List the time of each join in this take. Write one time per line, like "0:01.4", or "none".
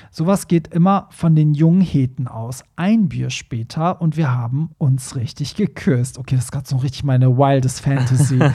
0:04.7